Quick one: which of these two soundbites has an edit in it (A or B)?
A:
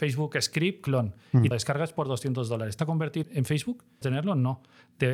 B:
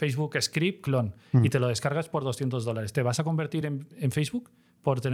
A